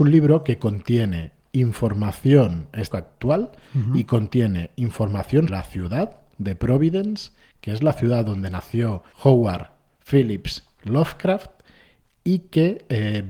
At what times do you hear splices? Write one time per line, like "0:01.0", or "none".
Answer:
0:02.9
0:05.5
0:09.1